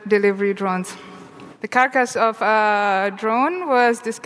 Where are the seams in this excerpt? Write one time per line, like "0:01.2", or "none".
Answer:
0:01.6